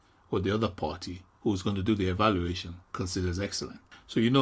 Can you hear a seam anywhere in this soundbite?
yes; 1 cut; at 2.8 s

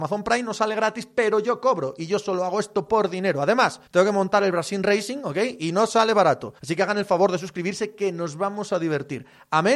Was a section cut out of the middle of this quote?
yes; 2 cuts; at 3.9 s, 6.6 s

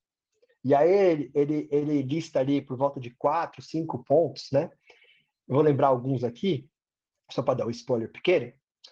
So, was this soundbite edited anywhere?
no; 0 cuts

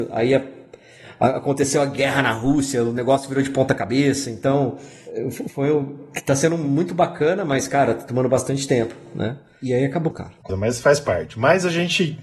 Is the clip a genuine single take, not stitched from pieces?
no; 2 cuts; at 10.1 s, 10.5 s

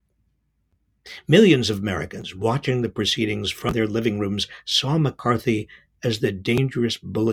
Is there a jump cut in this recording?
no; 0 cuts

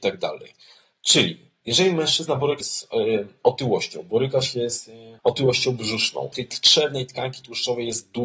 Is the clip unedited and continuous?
no; 3 cuts; at 2.6 s, 5.2 s, 6.3 s

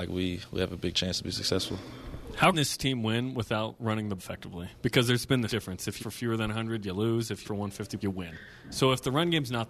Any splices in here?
yes; 6 cuts; at 2.5 s, 4.2 s, 5.5 s, 6.0 s, 7.4 s, 8.0 s

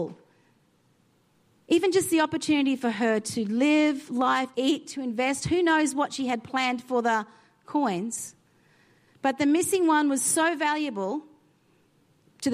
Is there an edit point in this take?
yes; 1 cut; at 4.5 s

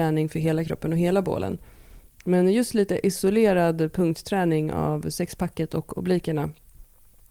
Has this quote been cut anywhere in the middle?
no; 0 cuts

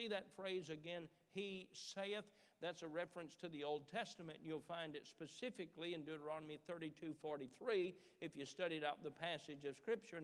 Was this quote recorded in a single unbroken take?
yes; 0 cuts

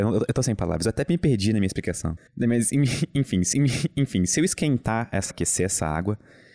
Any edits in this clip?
yes; 3 cuts; at 2.3 s, 3.5 s, 5.3 s

